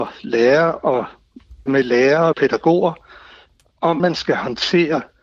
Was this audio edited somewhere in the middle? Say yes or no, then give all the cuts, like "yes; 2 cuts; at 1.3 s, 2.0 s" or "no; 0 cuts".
yes; 3 cuts; at 1.7 s, 2.3 s, 4.0 s